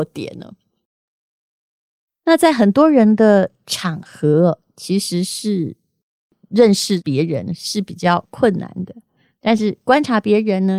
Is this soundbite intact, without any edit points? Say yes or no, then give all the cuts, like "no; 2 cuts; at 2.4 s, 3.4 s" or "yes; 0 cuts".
yes; 0 cuts